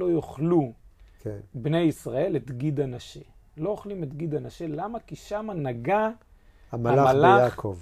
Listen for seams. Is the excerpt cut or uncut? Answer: uncut